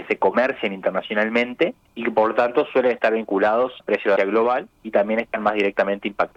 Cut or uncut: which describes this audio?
cut